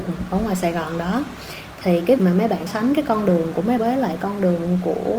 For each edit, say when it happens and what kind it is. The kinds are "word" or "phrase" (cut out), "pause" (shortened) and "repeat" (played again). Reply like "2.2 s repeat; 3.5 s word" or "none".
2.2 s word; 2.7 s word; 3.8 s word